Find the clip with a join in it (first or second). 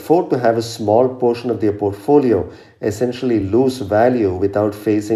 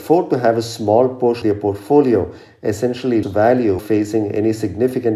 second